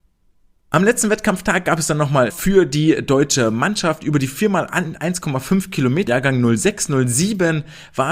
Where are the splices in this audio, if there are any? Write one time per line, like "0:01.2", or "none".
0:02.3
0:06.1